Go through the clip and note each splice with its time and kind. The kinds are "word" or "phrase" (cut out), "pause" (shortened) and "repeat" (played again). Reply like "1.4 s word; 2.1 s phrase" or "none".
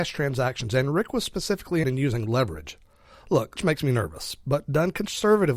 1.8 s word; 3.6 s word

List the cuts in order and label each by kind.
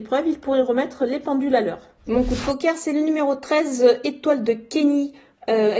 2.0 s pause

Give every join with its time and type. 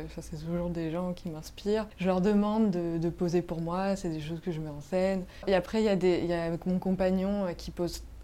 none

